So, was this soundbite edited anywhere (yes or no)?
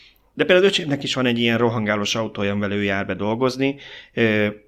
no